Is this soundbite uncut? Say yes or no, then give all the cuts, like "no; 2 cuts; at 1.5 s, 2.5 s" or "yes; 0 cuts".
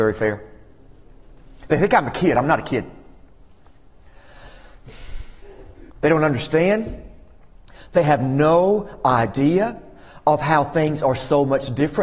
no; 1 cut; at 5.9 s